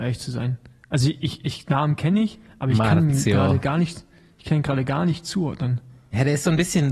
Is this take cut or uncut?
uncut